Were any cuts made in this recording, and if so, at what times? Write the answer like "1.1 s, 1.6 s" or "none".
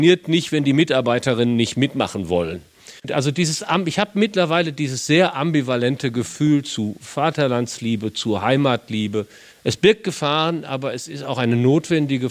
9.5 s